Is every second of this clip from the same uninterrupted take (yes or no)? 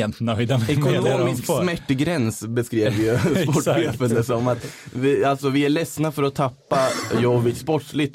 yes